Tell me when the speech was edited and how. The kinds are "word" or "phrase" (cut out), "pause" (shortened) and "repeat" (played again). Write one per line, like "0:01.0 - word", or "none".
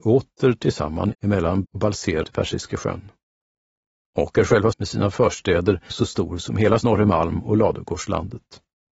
0:01.1 - word
0:01.6 - word
0:02.2 - word
0:04.7 - word
0:05.9 - word
0:06.8 - word